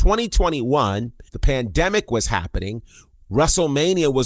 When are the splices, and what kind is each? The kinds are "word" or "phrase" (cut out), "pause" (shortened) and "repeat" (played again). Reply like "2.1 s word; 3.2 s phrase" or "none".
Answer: 1.3 s pause